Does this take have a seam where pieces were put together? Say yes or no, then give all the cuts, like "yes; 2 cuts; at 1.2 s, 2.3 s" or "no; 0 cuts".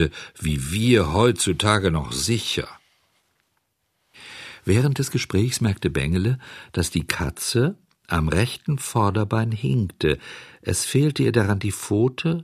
no; 0 cuts